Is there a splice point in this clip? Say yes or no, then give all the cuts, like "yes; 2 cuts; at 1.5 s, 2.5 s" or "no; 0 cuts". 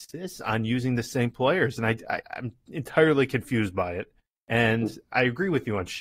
yes; 2 cuts; at 2.2 s, 4.3 s